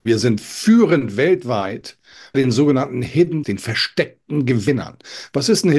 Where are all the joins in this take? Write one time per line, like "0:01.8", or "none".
0:02.3
0:03.4